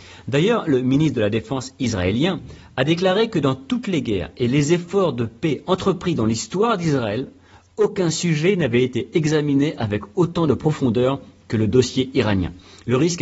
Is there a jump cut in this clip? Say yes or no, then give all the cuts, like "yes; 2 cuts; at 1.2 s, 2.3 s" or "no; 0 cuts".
no; 0 cuts